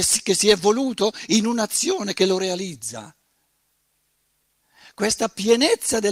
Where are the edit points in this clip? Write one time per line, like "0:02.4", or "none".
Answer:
none